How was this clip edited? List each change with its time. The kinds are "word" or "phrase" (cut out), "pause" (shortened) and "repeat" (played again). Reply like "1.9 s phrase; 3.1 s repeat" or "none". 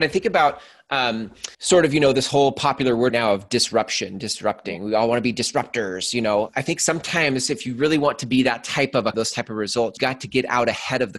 1.5 s pause; 3.1 s word; 6.5 s word; 9.1 s phrase; 10.0 s word